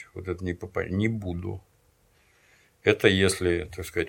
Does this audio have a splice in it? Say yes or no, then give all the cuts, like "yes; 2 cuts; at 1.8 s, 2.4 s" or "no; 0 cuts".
no; 0 cuts